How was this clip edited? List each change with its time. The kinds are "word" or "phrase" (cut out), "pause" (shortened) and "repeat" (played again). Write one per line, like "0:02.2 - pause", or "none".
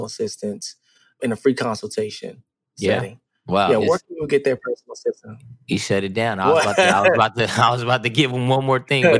0:03.8 - word